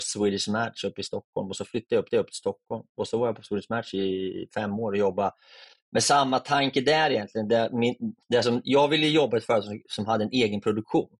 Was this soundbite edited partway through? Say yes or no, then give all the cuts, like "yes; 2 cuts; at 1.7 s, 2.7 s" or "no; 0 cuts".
yes; 2 cuts; at 2.1 s, 8.2 s